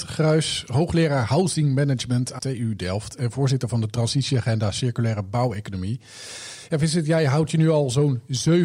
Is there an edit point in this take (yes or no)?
yes